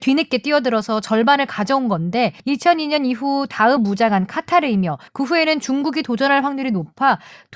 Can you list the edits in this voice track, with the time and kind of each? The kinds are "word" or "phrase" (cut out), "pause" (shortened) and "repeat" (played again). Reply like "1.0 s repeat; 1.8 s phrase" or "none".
2.4 s pause; 3.8 s phrase; 5.1 s pause

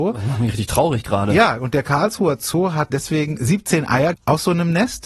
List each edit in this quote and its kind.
2.9 s word; 4.1 s word

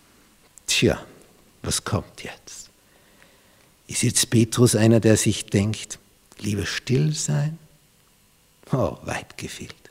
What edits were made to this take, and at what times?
none

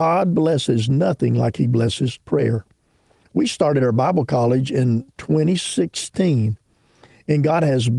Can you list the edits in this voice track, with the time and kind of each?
none

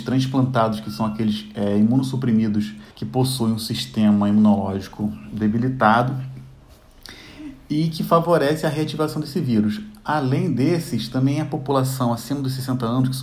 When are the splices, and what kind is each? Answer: 2.9 s pause

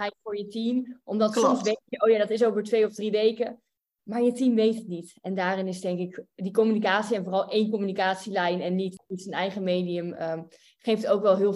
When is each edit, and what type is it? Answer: none

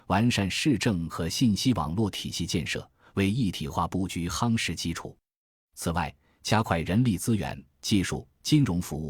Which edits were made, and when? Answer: none

